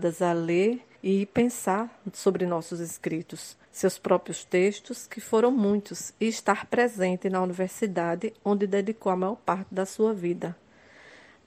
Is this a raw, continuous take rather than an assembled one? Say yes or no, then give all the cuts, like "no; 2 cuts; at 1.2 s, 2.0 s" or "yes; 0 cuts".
no; 2 cuts; at 1.0 s, 3.6 s